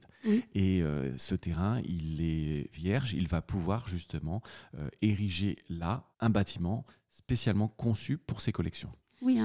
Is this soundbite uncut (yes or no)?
no